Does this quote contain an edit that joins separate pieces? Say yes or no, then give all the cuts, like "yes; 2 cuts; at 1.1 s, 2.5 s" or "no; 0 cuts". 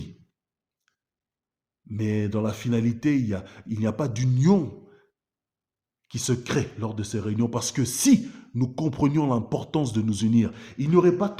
no; 0 cuts